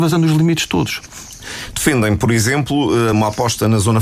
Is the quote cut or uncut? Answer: uncut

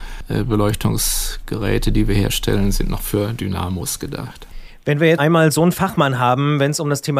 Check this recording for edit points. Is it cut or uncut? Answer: cut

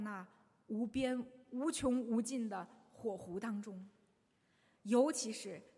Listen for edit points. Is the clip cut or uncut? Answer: uncut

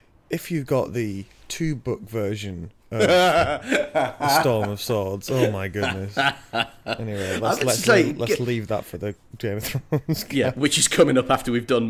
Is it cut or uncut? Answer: uncut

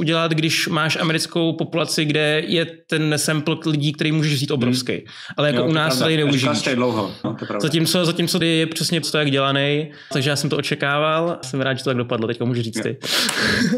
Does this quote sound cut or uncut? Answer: cut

